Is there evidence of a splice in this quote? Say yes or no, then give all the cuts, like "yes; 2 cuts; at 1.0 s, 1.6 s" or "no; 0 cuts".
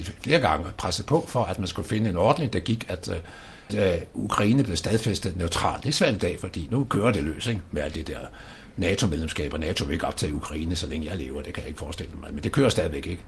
yes; 2 cuts; at 3.7 s, 6.7 s